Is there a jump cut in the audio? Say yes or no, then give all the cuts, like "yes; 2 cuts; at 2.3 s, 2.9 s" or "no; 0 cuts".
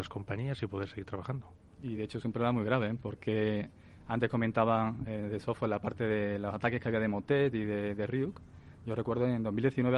no; 0 cuts